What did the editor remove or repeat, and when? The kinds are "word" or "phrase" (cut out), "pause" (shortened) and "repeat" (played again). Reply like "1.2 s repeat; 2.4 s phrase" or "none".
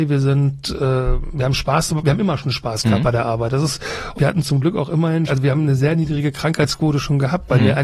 4.1 s word; 5.3 s word